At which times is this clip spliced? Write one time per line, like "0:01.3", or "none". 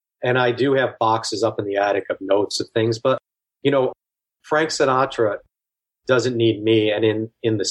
none